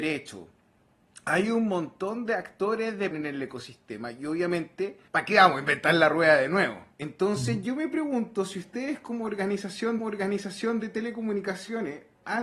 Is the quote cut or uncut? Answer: cut